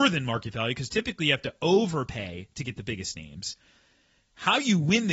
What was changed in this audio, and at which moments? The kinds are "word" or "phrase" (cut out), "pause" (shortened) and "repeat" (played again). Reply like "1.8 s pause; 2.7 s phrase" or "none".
none